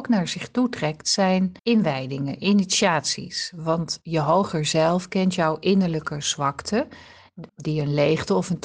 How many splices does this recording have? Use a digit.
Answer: 2